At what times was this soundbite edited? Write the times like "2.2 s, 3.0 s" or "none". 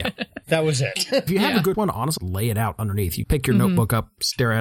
1.3 s, 1.7 s, 2.2 s, 3.2 s